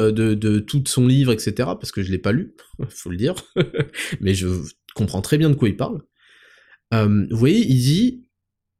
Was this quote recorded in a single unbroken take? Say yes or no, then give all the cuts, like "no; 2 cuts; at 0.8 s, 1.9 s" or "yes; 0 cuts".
yes; 0 cuts